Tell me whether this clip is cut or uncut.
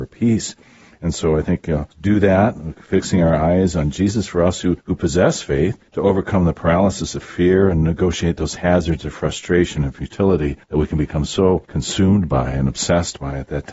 cut